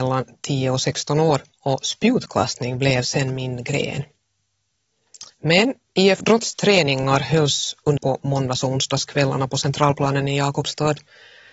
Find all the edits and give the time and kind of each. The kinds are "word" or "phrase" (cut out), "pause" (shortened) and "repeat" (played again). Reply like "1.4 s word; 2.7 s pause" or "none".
1.5 s pause; 5.3 s pause; 8.0 s word